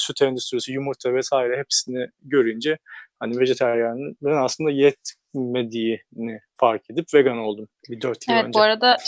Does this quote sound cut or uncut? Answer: uncut